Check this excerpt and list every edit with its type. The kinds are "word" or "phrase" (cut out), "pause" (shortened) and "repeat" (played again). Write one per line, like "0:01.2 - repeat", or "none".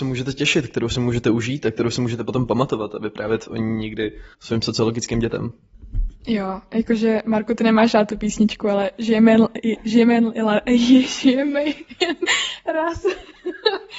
0:04.3 - pause